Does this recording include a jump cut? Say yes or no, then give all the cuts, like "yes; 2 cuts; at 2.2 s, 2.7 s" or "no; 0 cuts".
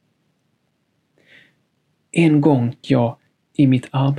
yes; 1 cut; at 2.8 s